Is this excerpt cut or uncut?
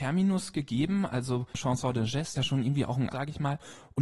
cut